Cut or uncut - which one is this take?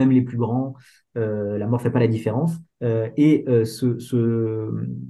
cut